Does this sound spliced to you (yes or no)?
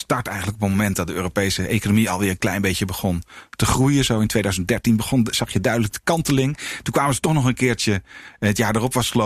no